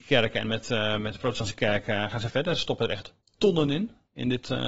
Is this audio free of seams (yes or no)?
no